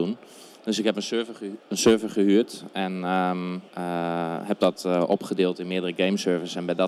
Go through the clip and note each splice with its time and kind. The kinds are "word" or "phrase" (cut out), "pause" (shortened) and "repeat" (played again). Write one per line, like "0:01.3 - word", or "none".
0:03.7 - pause